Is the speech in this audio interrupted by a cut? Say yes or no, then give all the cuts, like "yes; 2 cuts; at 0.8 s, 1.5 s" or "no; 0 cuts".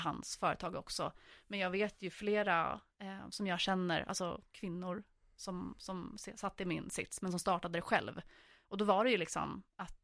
no; 0 cuts